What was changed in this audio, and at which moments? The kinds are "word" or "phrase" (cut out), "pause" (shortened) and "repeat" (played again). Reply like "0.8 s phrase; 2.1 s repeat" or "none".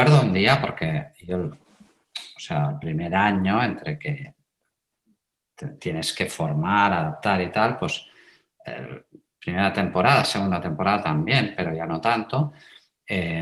none